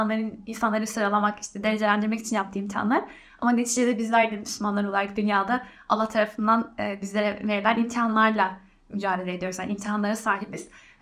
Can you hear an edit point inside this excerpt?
no; 0 cuts

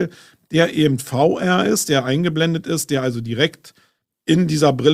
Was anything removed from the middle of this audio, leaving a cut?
no; 0 cuts

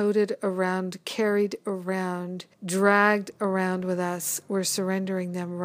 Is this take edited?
yes; 1 cut; at 2.5 s

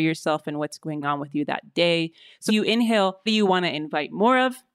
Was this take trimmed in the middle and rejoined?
yes; 3 cuts; at 1.0 s, 2.5 s, 3.3 s

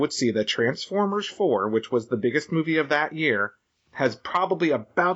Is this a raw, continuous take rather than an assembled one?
yes; 0 cuts

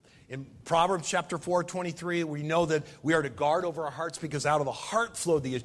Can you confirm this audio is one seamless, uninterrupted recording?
yes; 0 cuts

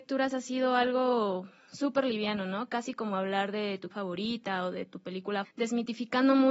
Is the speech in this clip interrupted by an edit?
yes; 2 cuts; at 3.9 s, 5.4 s

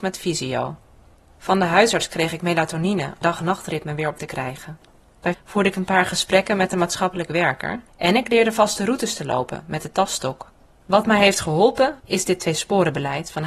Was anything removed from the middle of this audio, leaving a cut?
yes; 5 cuts; at 3.2 s, 4.2 s, 5.3 s, 7.9 s, 12.0 s

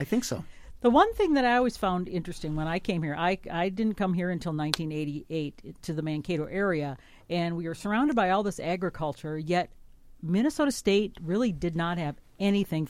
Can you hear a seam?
no; 0 cuts

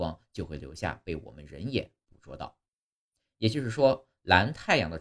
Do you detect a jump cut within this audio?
no; 0 cuts

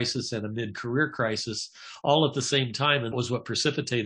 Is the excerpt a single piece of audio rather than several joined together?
no; 1 cut; at 3.1 s

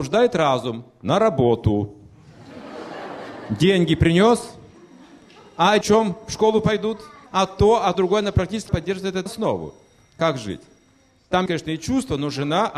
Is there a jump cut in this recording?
yes; 6 cuts; at 5.8 s, 7.3 s, 7.9 s, 8.7 s, 9.3 s, 11.5 s

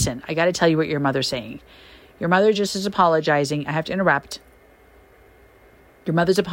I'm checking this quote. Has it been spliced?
no; 0 cuts

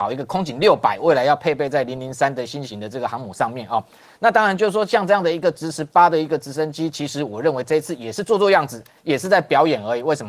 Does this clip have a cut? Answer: no; 0 cuts

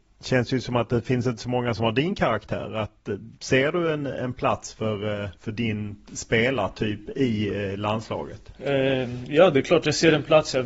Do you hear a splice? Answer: yes; 2 cuts; at 3.4 s, 5.4 s

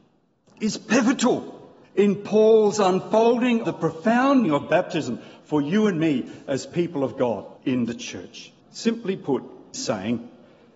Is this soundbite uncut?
no; 6 cuts; at 1.8 s, 3.6 s, 4.4 s, 7.6 s, 8.6 s, 9.7 s

